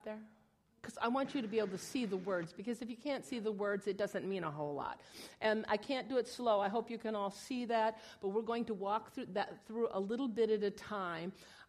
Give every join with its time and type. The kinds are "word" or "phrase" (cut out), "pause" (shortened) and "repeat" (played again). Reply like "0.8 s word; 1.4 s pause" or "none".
none